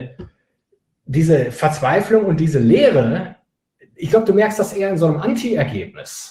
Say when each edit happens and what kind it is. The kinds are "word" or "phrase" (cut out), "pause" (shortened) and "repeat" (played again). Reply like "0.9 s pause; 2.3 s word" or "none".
none